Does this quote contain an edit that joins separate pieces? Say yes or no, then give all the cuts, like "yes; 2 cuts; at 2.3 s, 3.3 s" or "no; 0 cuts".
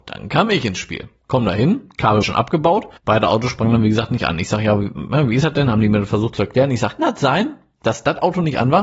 yes; 3 cuts; at 2.2 s, 3.0 s, 7.0 s